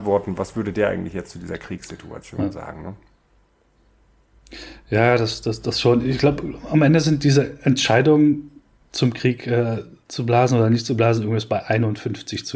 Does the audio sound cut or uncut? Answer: uncut